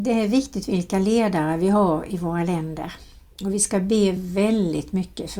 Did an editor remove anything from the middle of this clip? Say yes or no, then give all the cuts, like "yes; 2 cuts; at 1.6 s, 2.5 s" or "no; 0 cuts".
no; 0 cuts